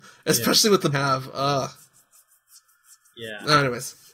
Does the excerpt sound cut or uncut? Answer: cut